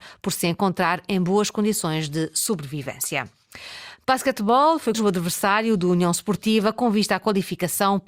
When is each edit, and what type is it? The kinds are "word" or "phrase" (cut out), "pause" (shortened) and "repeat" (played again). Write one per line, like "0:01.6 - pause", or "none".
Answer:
0:04.9 - phrase